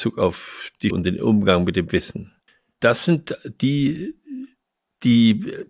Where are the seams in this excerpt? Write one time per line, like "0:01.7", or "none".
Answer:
0:00.9
0:02.5